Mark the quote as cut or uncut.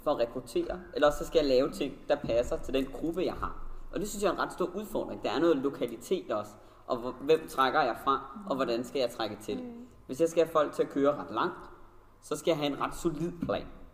uncut